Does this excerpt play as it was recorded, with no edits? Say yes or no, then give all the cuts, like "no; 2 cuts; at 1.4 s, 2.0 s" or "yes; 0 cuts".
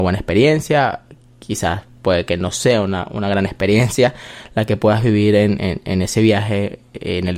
yes; 0 cuts